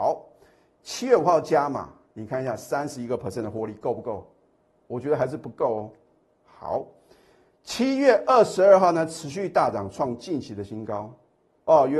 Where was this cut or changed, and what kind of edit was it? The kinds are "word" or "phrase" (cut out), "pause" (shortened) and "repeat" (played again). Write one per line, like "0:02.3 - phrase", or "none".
none